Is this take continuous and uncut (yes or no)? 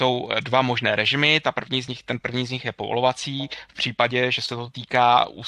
yes